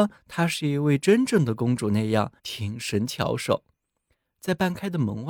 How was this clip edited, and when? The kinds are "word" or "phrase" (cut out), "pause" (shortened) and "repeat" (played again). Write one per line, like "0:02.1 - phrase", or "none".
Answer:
0:02.4 - pause